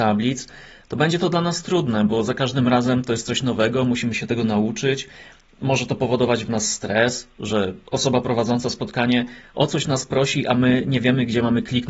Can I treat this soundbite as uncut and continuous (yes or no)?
yes